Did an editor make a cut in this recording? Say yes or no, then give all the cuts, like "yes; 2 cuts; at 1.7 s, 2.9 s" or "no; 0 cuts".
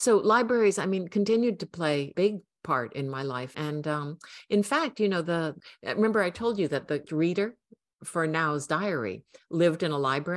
yes; 2 cuts; at 3.5 s, 7.1 s